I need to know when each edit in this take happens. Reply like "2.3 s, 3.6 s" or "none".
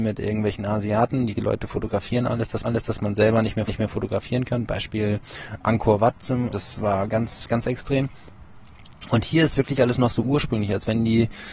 1.3 s, 2.6 s, 3.7 s, 6.5 s